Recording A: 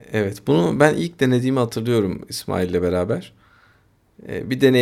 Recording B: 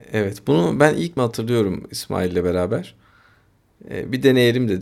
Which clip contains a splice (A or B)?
B